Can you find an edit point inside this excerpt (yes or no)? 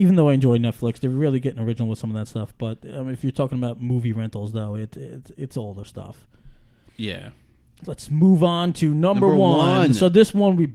no